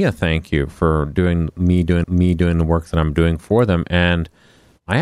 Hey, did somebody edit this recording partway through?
yes; 1 cut; at 2.0 s

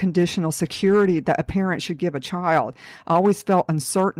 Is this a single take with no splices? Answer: yes; 0 cuts

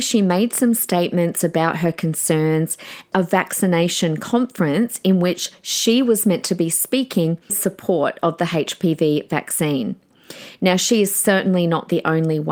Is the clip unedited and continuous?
no; 2 cuts; at 3.1 s, 7.5 s

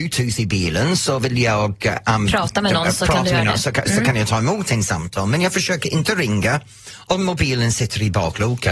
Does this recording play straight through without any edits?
yes; 0 cuts

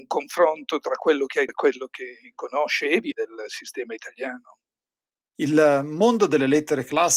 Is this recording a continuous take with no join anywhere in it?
no; 2 cuts; at 1.5 s, 3.1 s

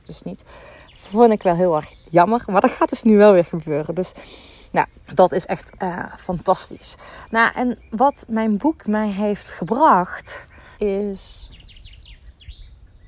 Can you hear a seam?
yes; 2 cuts; at 5.0 s, 10.7 s

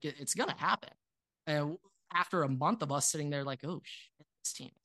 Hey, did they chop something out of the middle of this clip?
no; 0 cuts

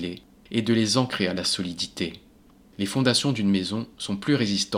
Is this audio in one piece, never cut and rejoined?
yes; 0 cuts

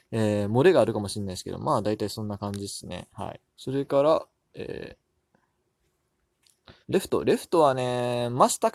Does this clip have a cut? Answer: yes; 2 cuts; at 3.5 s, 6.8 s

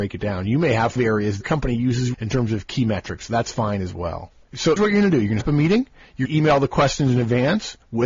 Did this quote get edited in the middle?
yes; 6 cuts; at 1.0 s, 1.4 s, 2.1 s, 4.8 s, 5.4 s, 6.3 s

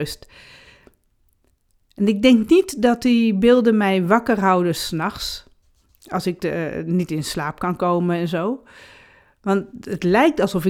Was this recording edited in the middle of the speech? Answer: no; 0 cuts

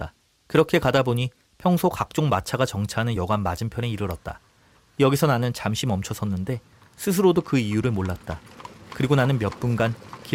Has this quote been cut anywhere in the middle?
no; 0 cuts

